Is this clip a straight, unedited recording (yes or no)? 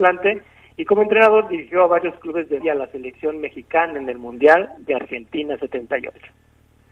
no